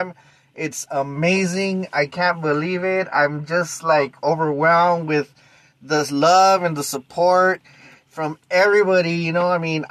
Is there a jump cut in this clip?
no; 0 cuts

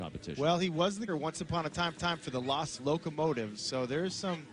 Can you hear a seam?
yes; 3 cuts; at 1.1 s, 2.0 s, 2.8 s

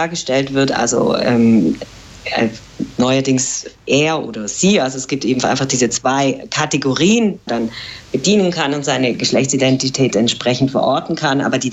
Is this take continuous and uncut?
no; 1 cut; at 7.5 s

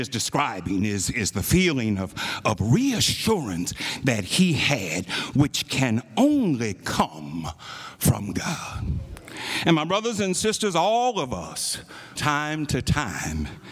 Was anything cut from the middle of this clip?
yes; 1 cut; at 12.2 s

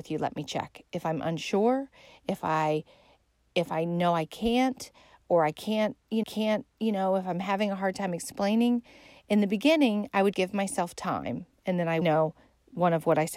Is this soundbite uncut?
no; 3 cuts; at 6.2 s, 10.3 s, 12.0 s

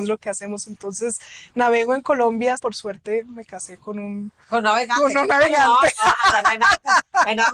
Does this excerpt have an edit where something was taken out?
yes; 1 cut; at 2.6 s

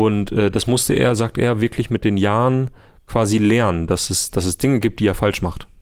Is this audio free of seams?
yes; 0 cuts

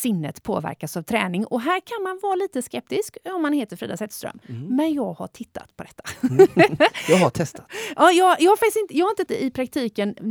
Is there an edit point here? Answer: yes; 1 cut; at 9.3 s

